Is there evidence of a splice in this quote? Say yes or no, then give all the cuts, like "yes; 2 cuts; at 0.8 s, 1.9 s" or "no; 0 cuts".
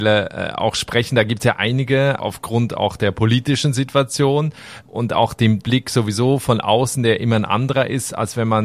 yes; 2 cuts; at 2.2 s, 5.6 s